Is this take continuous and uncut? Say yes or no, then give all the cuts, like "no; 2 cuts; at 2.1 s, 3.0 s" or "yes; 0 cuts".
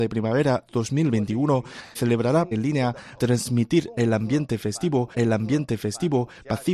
no; 4 cuts; at 1.9 s, 2.5 s, 3.2 s, 5.1 s